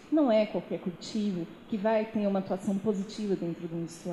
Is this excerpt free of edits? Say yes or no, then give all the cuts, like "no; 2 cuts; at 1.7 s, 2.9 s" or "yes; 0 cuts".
yes; 0 cuts